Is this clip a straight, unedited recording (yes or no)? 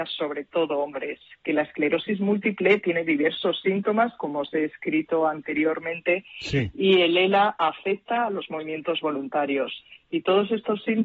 yes